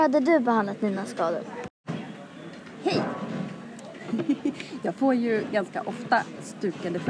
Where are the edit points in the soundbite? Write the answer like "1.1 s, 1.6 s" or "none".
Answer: none